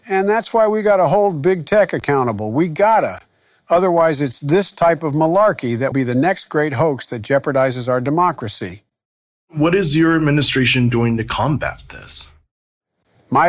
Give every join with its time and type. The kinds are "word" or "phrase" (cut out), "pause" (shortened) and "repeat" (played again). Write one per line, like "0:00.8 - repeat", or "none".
0:05.9 - word